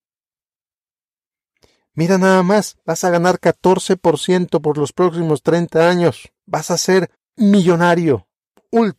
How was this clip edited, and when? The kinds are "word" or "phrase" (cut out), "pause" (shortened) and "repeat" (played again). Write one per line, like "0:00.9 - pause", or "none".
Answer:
0:06.4 - pause
0:07.1 - pause